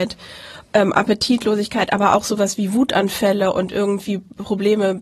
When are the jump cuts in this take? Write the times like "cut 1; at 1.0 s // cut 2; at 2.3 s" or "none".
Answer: none